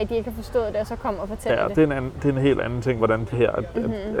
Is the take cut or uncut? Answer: cut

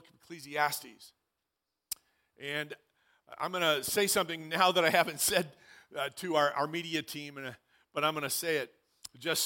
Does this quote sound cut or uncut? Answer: uncut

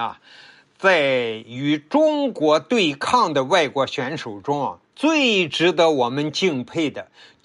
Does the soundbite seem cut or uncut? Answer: uncut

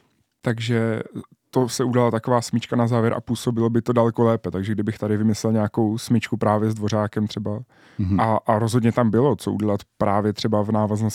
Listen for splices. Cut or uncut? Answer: uncut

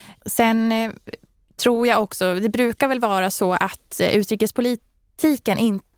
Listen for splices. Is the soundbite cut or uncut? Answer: uncut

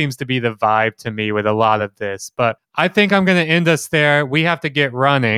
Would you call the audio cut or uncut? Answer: uncut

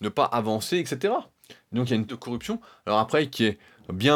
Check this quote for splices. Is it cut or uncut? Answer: cut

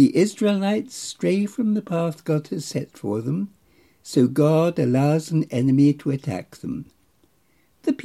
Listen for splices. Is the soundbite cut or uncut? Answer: uncut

